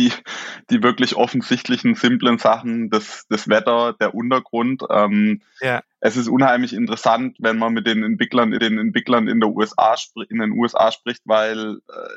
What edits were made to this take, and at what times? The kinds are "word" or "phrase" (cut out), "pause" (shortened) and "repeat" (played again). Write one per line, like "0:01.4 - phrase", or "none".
0:08.6 - repeat